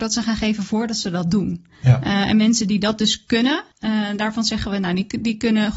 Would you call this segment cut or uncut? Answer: cut